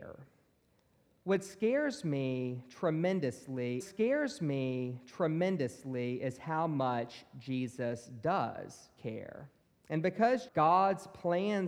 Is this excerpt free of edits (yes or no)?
no